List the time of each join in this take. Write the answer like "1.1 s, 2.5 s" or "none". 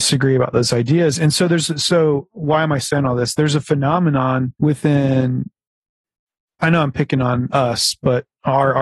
4.6 s